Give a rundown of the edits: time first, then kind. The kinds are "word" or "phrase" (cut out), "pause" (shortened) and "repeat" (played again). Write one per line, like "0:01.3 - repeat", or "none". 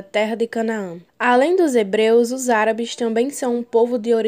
0:01.1 - pause